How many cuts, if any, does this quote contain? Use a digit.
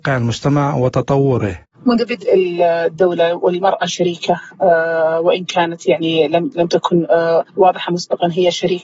1